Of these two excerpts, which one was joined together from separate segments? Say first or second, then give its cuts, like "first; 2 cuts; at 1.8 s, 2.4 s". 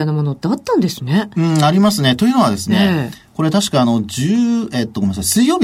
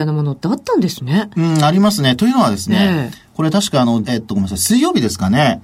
second; 1 cut; at 4.0 s